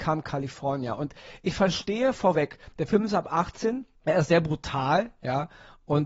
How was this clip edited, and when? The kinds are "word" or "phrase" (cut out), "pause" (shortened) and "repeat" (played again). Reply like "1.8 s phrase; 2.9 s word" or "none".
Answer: 4.0 s pause